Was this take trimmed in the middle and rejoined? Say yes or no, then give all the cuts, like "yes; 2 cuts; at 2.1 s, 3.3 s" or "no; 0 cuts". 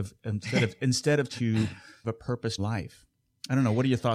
yes; 3 cuts; at 1.3 s, 2.0 s, 2.6 s